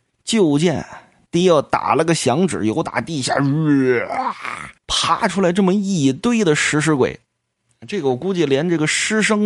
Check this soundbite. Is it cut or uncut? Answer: cut